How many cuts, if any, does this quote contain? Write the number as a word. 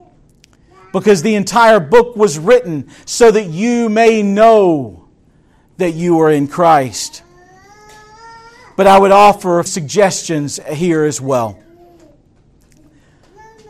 one